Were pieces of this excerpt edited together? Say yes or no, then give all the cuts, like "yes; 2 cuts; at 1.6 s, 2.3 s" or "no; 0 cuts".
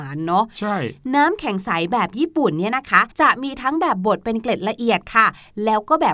yes; 1 cut; at 3.1 s